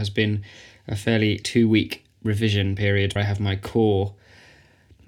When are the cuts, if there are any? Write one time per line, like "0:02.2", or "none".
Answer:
0:01.4
0:03.2